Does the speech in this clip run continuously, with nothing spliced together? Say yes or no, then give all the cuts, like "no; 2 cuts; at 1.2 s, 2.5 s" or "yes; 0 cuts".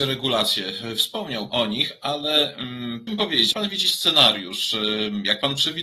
no; 3 cuts; at 1.5 s, 3.1 s, 3.5 s